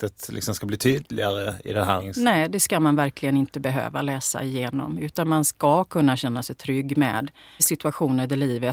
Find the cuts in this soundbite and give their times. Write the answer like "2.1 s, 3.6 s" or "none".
7.6 s